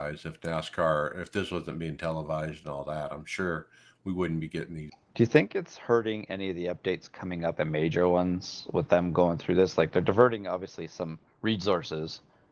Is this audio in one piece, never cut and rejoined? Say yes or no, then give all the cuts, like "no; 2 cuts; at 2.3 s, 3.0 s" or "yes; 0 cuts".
no; 1 cut; at 7.6 s